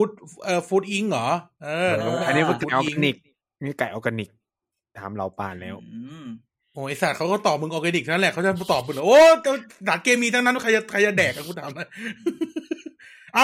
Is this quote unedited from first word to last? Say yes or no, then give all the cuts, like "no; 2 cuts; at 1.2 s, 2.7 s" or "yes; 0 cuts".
yes; 0 cuts